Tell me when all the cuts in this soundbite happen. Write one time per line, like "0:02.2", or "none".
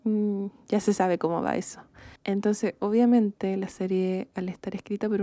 0:02.2